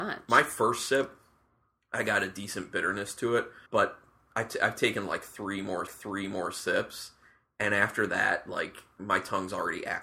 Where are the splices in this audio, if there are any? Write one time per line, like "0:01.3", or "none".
0:03.7
0:05.9